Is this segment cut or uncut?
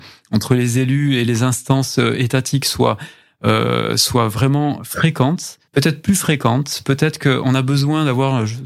cut